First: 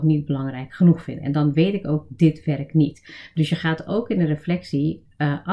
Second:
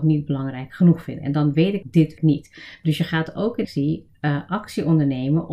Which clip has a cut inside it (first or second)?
second